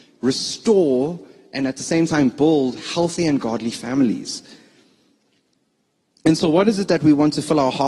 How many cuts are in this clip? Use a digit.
0